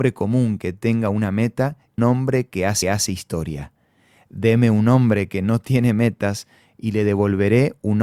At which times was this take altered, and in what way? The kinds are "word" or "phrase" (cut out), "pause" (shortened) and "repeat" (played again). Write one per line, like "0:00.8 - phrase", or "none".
0:02.0 - phrase
0:02.8 - repeat